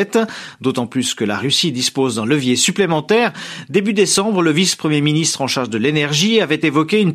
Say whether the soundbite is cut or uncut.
uncut